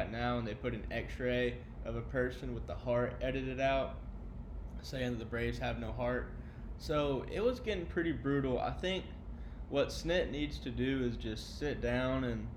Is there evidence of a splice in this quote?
no; 0 cuts

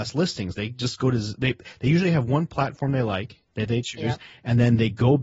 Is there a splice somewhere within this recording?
yes; 1 cut; at 3.5 s

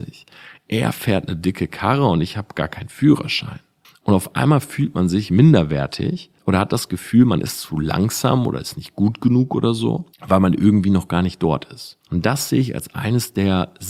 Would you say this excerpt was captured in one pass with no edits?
no; 4 cuts; at 3.8 s, 6.4 s, 10.1 s, 12.0 s

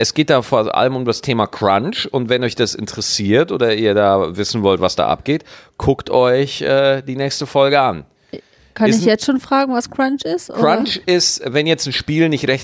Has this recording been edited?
no; 0 cuts

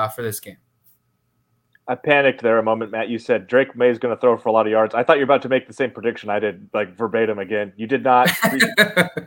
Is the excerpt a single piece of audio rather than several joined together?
yes; 0 cuts

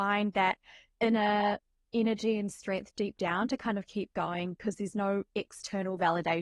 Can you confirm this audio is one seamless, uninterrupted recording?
yes; 0 cuts

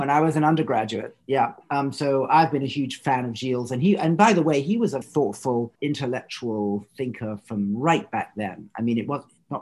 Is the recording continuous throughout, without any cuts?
no; 2 cuts; at 5.0 s, 5.7 s

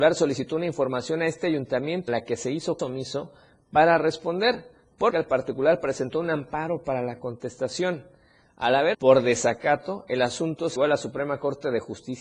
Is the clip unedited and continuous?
no; 5 cuts; at 2.1 s, 2.8 s, 5.1 s, 8.9 s, 10.8 s

